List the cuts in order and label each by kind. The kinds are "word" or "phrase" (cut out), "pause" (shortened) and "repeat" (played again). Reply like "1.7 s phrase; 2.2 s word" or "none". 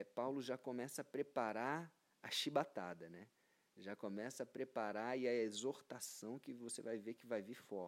none